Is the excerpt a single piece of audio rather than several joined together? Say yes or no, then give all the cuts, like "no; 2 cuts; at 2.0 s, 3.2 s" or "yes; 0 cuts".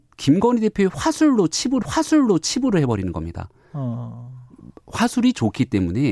no; 1 cut; at 1.8 s